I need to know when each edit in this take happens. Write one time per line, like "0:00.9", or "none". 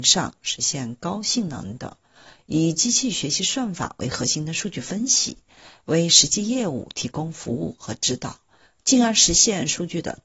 none